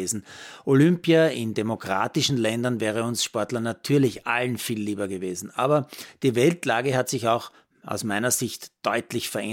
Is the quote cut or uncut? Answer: uncut